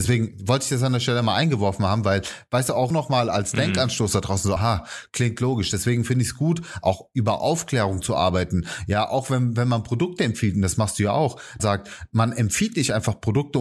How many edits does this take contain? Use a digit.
3